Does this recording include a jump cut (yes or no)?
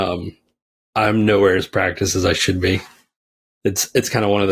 yes